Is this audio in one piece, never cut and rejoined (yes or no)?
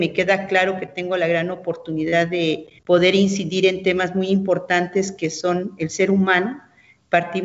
no